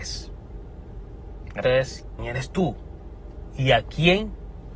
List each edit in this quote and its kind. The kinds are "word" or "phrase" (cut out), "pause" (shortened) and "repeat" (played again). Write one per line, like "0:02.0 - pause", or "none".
0:01.6 - word
0:02.2 - word